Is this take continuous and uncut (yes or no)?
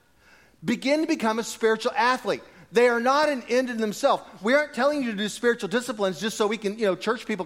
yes